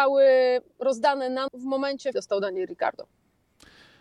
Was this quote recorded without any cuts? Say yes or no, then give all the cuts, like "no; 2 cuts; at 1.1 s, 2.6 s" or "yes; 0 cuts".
no; 2 cuts; at 1.5 s, 2.1 s